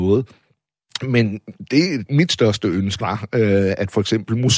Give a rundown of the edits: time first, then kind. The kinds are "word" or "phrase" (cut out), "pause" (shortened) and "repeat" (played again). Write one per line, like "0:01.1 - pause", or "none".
0:02.1 - word
0:03.0 - word